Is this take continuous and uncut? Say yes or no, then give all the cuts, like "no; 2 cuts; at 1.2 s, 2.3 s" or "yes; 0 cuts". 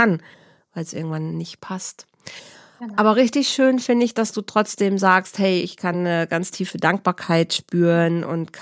yes; 0 cuts